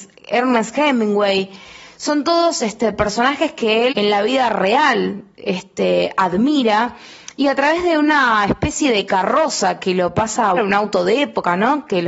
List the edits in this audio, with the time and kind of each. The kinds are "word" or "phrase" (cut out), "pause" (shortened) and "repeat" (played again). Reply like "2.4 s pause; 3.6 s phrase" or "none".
3.9 s word; 9.8 s word; 10.6 s word